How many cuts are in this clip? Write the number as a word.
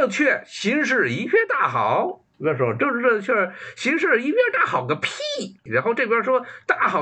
one